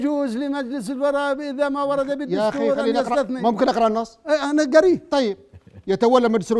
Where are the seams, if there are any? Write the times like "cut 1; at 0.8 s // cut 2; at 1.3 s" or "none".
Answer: none